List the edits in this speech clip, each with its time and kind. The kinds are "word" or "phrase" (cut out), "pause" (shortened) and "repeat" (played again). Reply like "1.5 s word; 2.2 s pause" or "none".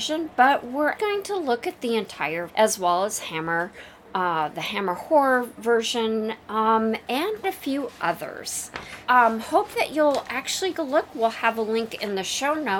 1.0 s word; 2.5 s word; 5.6 s word; 7.4 s word; 9.1 s word; 10.7 s word

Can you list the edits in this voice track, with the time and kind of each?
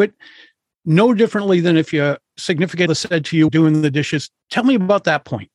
2.9 s word; 3.5 s phrase

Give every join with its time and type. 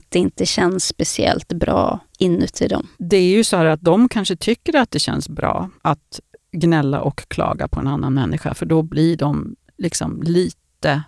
2.1 s pause; 2.9 s pause; 5.8 s pause

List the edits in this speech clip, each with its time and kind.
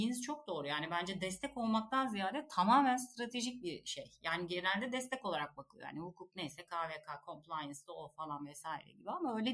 none

